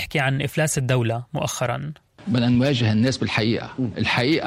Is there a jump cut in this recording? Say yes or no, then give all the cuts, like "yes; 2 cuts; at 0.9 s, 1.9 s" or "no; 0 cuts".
no; 0 cuts